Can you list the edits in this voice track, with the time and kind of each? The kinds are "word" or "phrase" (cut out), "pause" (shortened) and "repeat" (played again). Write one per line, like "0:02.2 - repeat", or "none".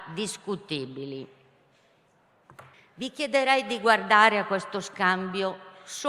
0:02.7 - pause